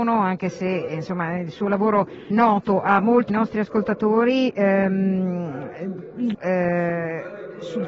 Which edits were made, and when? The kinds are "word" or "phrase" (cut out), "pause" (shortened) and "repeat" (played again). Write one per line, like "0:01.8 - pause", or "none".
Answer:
0:02.3 - word
0:03.3 - word
0:06.3 - word